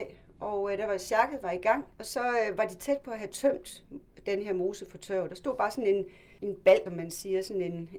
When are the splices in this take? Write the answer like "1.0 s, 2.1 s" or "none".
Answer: 1.9 s, 6.4 s, 6.9 s